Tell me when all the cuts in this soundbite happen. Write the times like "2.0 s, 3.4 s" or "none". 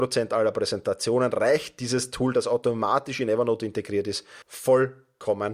4.4 s